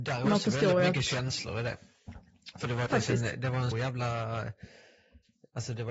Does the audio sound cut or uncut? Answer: cut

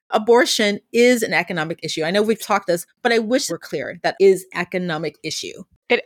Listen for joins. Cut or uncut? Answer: cut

